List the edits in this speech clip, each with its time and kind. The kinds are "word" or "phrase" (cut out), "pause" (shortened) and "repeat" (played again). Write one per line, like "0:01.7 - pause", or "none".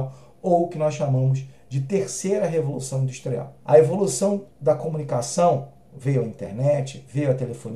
0:03.6 - pause
0:04.5 - pause